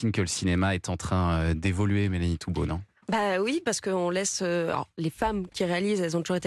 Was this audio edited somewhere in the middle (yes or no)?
no